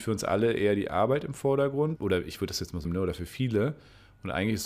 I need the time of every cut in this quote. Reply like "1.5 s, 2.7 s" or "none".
2.0 s, 2.8 s